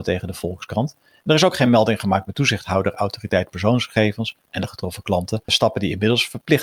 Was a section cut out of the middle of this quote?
no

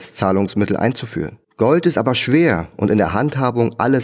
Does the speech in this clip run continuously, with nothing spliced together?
no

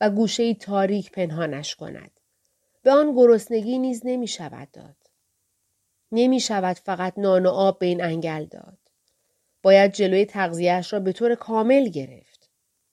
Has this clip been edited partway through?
no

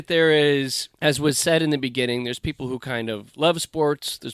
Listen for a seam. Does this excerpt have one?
yes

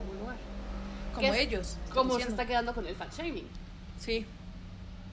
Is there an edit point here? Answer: no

